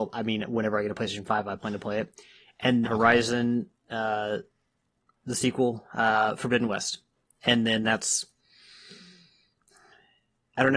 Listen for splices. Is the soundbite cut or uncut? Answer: cut